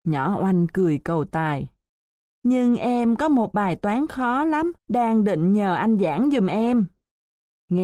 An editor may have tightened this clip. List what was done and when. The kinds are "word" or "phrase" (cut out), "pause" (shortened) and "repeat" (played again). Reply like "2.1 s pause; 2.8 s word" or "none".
4.8 s pause